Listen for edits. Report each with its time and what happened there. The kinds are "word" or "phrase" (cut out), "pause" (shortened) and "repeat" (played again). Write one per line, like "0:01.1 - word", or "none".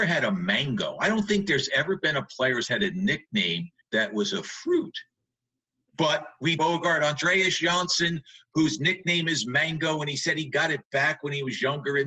0:03.8 - pause
0:06.6 - phrase